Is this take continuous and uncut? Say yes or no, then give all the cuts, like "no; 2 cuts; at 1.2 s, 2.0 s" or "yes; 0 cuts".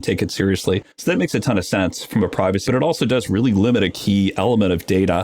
no; 2 cuts; at 0.9 s, 2.7 s